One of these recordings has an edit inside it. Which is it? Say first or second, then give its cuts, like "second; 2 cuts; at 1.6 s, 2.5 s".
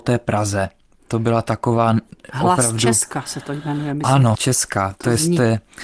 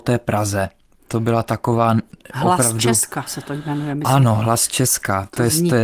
first; 1 cut; at 4.3 s